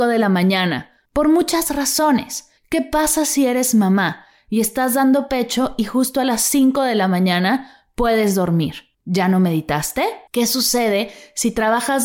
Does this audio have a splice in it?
yes; 4 cuts; at 1.1 s, 2.6 s, 8.9 s, 10.3 s

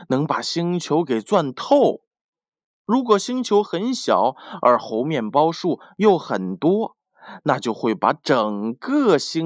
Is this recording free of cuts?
yes; 0 cuts

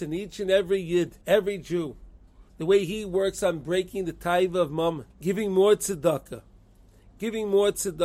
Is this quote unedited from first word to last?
no; 3 cuts; at 1.2 s, 2.5 s, 5.1 s

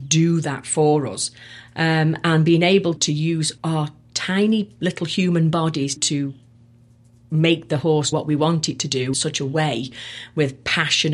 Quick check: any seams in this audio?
yes; 5 cuts; at 3.0 s, 3.6 s, 6.0 s, 8.1 s, 9.1 s

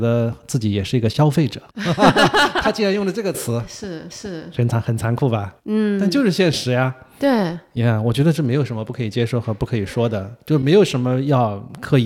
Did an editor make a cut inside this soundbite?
yes; 3 cuts; at 1.7 s, 4.1 s, 5.6 s

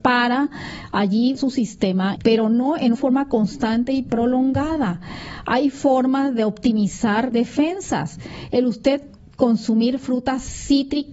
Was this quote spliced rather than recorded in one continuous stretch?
yes; 4 cuts; at 1.4 s, 2.2 s, 2.9 s, 7.3 s

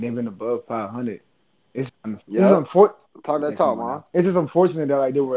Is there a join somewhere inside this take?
yes; 2 cuts; at 1.9 s, 2.2 s

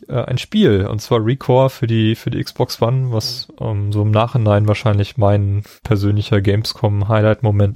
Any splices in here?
no; 0 cuts

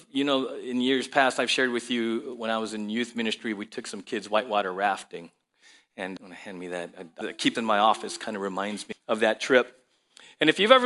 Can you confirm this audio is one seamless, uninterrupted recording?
no; 4 cuts; at 6.2 s, 7.2 s, 7.5 s, 8.9 s

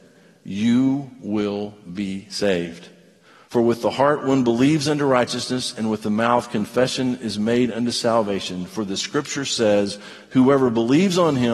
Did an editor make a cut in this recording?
no; 0 cuts

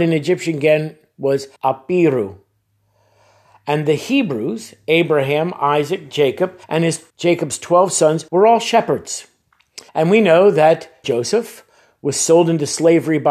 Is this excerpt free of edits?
no; 6 cuts; at 1.6 s, 6.6 s, 7.1 s, 8.3 s, 9.9 s, 11.0 s

